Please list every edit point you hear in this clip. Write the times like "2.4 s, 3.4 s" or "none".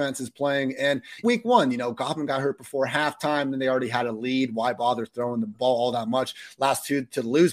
1.2 s, 5.5 s